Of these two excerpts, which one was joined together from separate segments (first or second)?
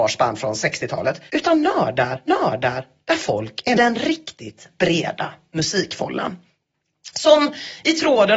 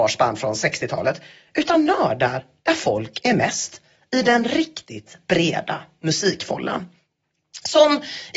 first